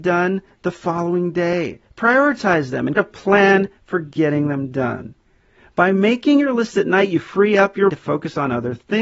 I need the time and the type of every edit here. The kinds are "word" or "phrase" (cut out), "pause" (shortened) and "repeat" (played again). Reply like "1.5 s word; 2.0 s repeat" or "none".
3.0 s word; 7.9 s word